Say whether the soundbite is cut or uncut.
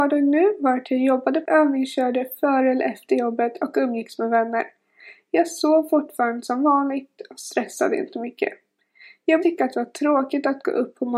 cut